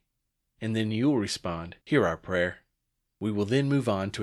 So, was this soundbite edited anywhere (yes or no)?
yes